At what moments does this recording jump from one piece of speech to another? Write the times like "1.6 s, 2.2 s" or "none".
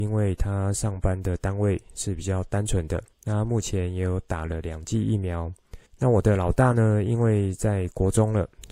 3.1 s, 5.9 s